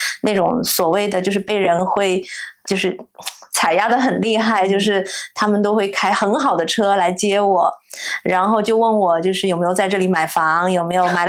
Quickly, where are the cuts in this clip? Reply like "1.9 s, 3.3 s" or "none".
2.6 s